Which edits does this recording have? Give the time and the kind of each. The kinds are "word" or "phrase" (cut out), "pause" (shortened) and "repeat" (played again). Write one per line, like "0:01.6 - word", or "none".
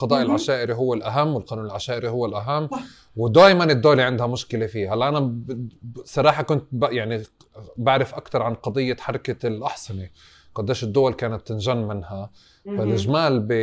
none